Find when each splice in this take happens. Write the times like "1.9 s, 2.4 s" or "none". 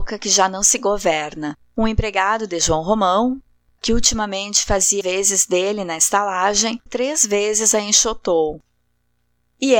5.0 s, 6.9 s